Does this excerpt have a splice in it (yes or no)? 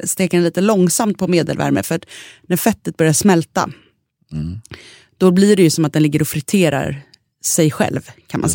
no